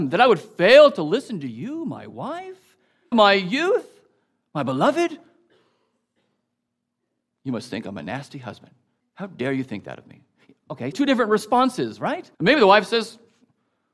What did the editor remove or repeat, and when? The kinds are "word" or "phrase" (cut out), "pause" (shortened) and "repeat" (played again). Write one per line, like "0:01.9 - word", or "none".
0:03.1 - phrase
0:09.0 - pause
0:10.9 - word
0:12.3 - pause

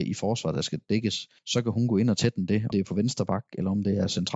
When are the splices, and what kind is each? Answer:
0:01.4 - pause
0:02.7 - word

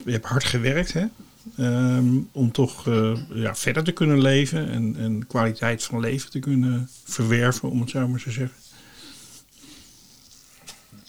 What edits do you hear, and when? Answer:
none

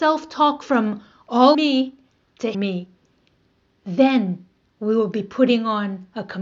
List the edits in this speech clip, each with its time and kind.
0:01.5 - phrase
0:02.5 - phrase

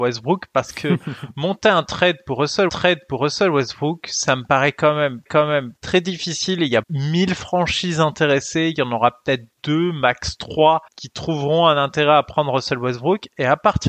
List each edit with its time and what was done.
0:02.7 - repeat
0:05.3 - repeat
0:06.8 - word
0:10.9 - pause

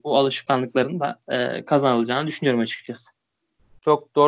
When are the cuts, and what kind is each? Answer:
none

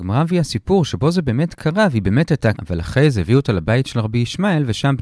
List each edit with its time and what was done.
0:02.6 - word

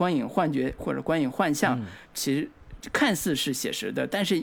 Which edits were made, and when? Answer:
0:02.1 - word

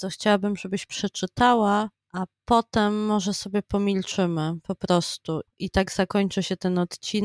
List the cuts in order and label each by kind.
none

